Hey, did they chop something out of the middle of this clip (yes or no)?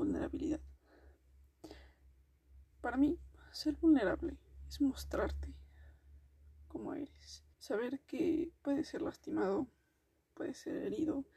yes